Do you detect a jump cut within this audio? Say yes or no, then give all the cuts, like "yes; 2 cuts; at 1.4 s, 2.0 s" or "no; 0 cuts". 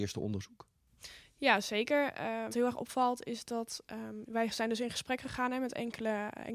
yes; 1 cut; at 2.5 s